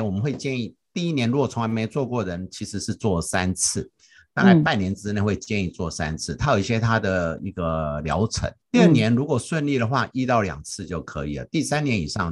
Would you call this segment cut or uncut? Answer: cut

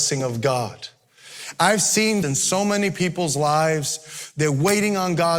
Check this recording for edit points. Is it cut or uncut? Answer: cut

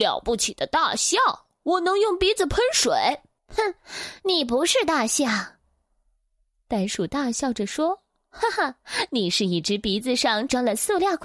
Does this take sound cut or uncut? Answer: cut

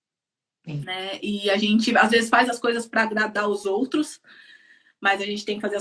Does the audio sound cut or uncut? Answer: uncut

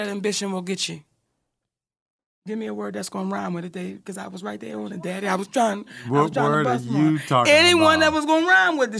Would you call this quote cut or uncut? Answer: uncut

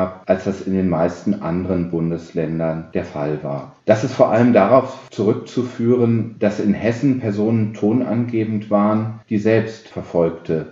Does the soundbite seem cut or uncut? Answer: cut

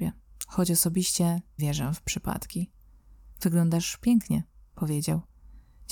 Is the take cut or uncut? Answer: cut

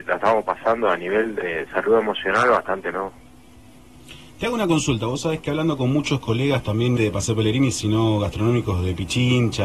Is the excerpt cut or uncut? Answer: cut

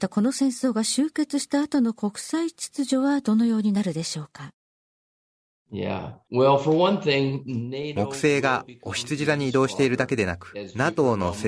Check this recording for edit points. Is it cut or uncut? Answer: uncut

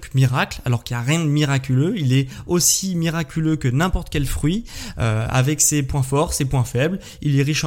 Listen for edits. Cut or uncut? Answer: uncut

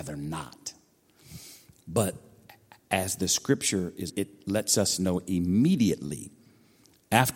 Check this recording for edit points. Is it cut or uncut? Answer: cut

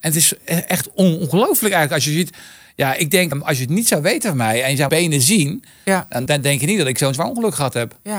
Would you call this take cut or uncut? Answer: cut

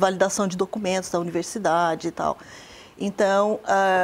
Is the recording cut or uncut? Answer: uncut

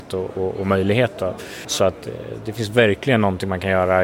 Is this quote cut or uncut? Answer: uncut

